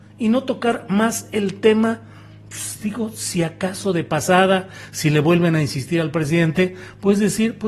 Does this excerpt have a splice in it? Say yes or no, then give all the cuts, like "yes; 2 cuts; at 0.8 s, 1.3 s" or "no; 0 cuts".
no; 0 cuts